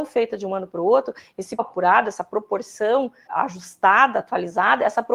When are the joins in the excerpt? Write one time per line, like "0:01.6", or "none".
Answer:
0:01.6
0:03.3

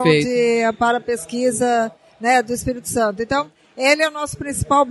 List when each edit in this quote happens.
none

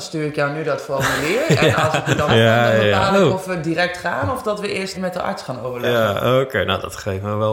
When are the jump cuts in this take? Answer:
0:02.3
0:04.9

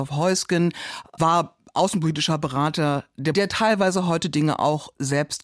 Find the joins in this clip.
0:03.3

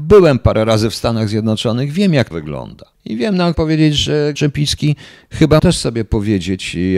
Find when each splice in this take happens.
0:02.3
0:02.9
0:03.5
0:04.3
0:05.6

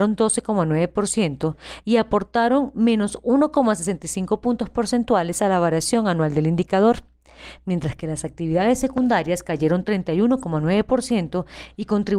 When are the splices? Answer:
none

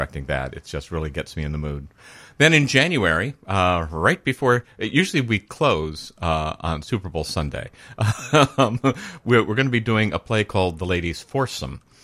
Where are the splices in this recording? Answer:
none

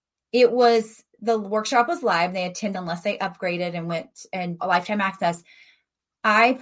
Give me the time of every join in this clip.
0:02.7
0:04.6

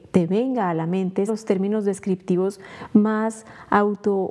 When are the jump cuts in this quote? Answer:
0:01.3

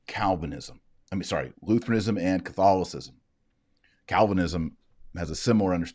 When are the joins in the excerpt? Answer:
none

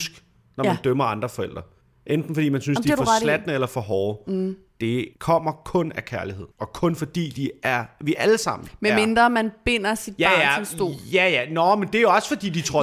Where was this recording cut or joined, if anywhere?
0:01.8
0:05.1
0:06.5

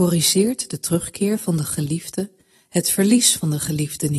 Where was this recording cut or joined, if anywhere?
none

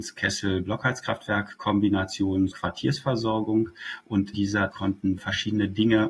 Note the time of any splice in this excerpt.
0:02.5
0:04.3
0:04.7
0:05.2

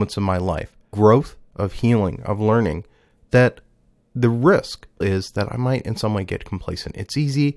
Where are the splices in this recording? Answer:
0:00.9
0:05.0

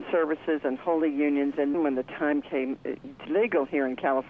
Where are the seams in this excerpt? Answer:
0:01.7
0:03.3

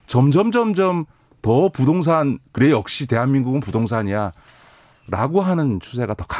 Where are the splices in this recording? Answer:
none

